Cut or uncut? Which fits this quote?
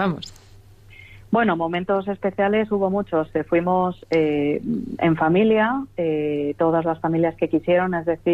uncut